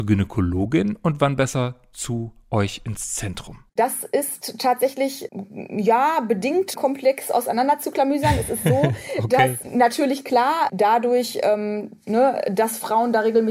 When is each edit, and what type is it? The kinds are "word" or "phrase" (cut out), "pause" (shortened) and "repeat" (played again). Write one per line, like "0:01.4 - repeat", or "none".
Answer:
0:03.7 - pause
0:06.7 - word
0:09.6 - word
0:10.7 - phrase